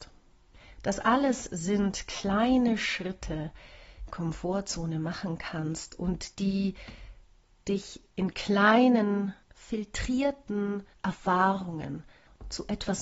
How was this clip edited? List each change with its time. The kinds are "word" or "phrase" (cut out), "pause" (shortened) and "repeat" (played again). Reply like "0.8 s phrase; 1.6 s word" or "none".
4.1 s phrase; 6.3 s pause